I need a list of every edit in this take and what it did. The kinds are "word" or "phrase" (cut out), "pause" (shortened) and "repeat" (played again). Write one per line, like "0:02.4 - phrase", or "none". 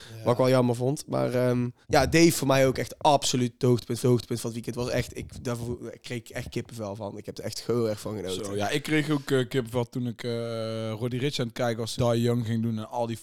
0:01.8 - pause
0:04.0 - repeat
0:12.0 - word